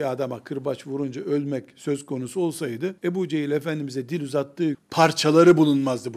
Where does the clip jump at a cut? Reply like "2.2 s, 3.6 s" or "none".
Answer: 3.0 s, 4.7 s